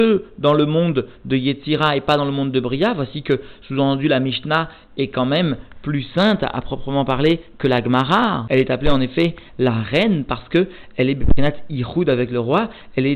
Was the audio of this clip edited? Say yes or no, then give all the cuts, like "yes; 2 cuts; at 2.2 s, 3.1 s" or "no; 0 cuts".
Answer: no; 0 cuts